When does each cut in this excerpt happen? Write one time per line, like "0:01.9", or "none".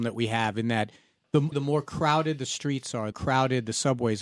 0:01.5
0:03.1